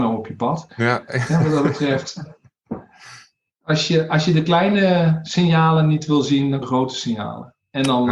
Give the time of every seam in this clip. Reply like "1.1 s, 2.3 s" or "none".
6.6 s